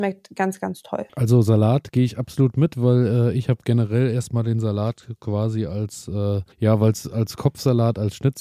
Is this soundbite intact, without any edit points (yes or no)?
no